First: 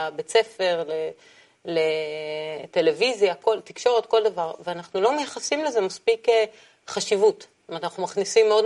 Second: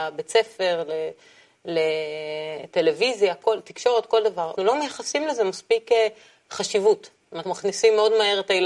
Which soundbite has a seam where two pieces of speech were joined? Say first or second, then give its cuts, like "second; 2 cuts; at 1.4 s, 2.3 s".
second; 2 cuts; at 4.6 s, 7.4 s